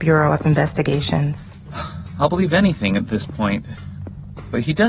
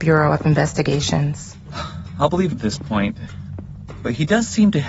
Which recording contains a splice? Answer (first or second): second